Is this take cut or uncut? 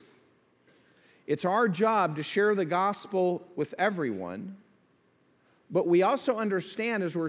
uncut